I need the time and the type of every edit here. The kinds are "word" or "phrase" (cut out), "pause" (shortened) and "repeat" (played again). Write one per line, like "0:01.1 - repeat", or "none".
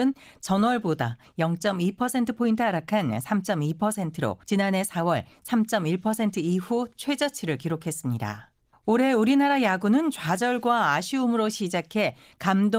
0:04.4 - pause
0:08.7 - pause